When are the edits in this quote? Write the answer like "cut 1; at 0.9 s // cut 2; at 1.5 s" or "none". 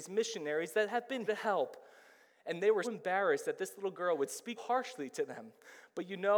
cut 1; at 1.3 s // cut 2; at 2.8 s // cut 3; at 4.6 s